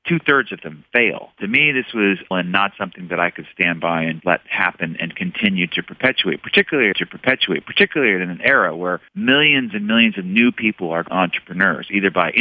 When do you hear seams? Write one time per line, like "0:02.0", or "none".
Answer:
0:01.3
0:02.3
0:04.2
0:06.9
0:09.1
0:11.1

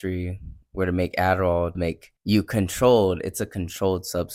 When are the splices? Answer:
0:01.8
0:02.2

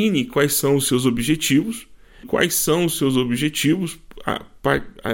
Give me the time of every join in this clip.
0:02.2

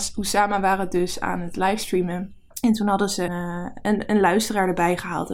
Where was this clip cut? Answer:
0:02.5
0:03.3

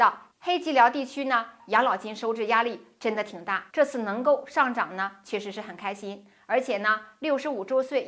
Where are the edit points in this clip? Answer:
0:03.7

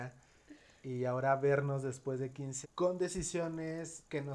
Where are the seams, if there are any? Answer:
0:02.6

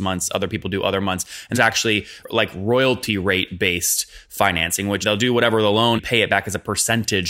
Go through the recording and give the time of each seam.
0:01.5
0:02.2
0:05.0
0:06.0

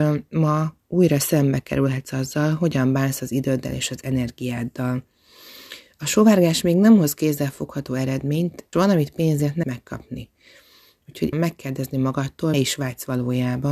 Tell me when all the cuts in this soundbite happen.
0:08.7
0:09.6
0:11.3
0:12.5

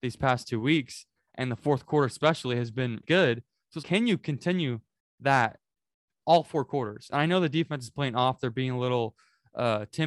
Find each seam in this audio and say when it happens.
0:03.0
0:03.8
0:06.2

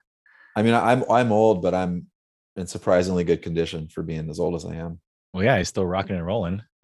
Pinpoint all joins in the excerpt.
none

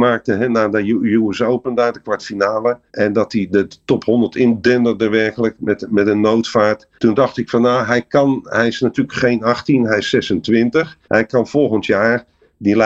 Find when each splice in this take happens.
0:02.9
0:06.9
0:11.0

